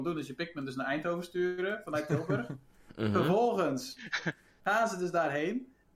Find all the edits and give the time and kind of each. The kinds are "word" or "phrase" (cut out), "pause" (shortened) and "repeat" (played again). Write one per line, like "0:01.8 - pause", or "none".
none